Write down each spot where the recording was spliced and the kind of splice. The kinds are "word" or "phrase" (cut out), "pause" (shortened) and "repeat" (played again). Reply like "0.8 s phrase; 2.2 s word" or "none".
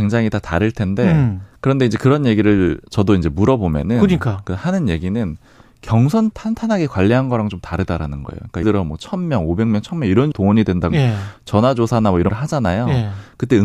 2.9 s pause; 6.3 s phrase; 8.6 s word; 10.3 s word; 10.9 s word; 12.3 s word